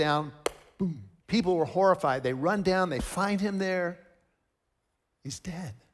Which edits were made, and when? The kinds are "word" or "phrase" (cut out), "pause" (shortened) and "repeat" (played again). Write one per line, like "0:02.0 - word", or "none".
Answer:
0:01.2 - pause